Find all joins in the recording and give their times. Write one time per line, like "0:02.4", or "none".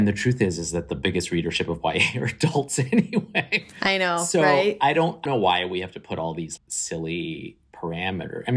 0:05.3
0:06.6

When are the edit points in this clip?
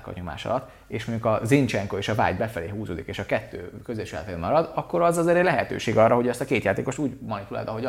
none

